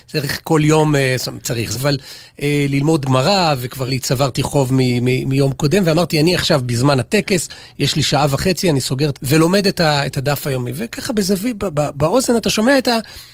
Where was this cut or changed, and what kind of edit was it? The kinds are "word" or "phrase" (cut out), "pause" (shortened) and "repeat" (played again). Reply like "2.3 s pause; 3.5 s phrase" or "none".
1.7 s word; 3.0 s word; 3.9 s word; 9.1 s phrase